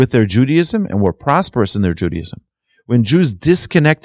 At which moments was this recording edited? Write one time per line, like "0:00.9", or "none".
none